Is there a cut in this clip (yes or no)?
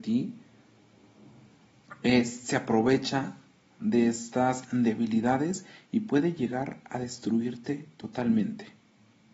no